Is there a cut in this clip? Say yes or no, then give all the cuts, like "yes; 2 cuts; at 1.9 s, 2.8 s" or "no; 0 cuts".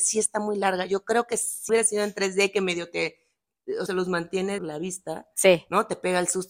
yes; 3 cuts; at 1.7 s, 3.9 s, 4.6 s